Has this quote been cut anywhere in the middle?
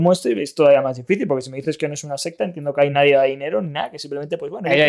no; 0 cuts

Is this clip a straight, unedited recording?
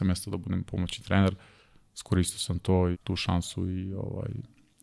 no; 1 cut; at 2.9 s

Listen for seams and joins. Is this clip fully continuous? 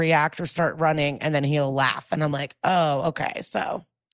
yes; 0 cuts

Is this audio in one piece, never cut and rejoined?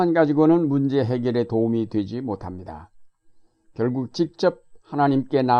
yes; 0 cuts

